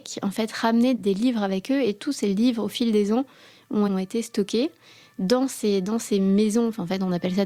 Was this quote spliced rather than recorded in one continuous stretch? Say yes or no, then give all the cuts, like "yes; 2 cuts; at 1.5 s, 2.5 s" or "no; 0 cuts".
yes; 2 cuts; at 1.0 s, 3.9 s